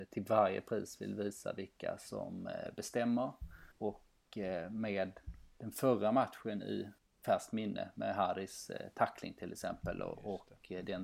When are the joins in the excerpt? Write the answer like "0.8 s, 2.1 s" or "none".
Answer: 3.7 s, 7.0 s